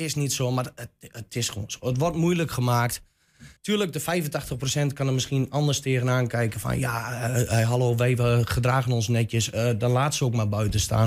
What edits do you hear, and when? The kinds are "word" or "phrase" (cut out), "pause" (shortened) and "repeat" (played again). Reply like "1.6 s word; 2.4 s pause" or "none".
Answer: 3.6 s pause